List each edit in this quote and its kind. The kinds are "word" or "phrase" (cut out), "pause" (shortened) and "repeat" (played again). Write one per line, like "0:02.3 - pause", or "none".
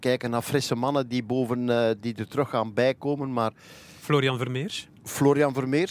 0:05.0 - pause